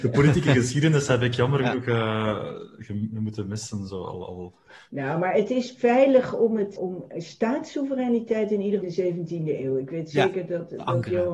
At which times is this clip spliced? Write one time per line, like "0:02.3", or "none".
0:04.7
0:06.8
0:08.8